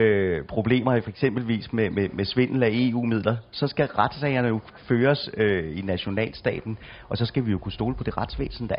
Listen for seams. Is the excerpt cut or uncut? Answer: uncut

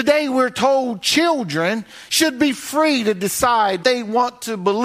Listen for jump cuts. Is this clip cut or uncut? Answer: cut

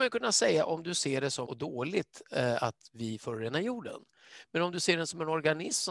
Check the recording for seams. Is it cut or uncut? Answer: cut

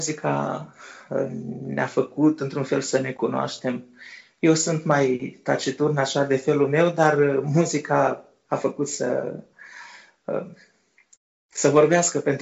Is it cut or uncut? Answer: uncut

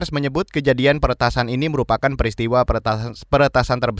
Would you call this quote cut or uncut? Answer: uncut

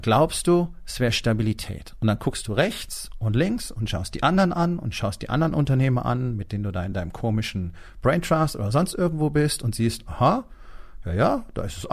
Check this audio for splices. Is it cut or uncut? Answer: uncut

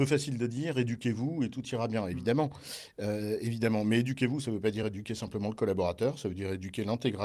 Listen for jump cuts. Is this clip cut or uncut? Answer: uncut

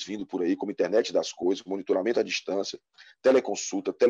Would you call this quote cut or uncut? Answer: uncut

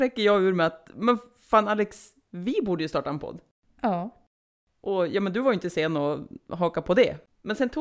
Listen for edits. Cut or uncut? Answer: uncut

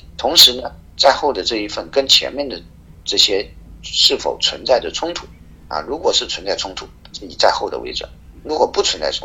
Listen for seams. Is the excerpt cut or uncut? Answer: uncut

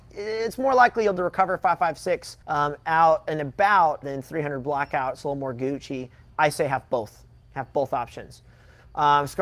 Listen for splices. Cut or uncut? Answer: cut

